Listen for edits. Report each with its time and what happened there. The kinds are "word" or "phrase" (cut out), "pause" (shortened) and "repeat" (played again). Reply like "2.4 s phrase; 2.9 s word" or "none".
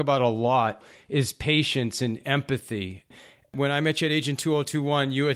none